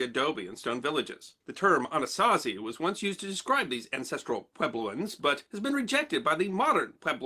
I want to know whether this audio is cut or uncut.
cut